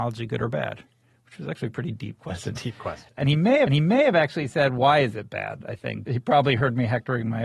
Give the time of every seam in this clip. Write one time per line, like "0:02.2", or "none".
0:03.7